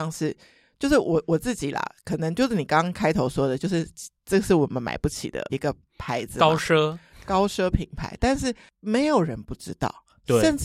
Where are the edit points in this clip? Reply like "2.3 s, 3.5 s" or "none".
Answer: 5.5 s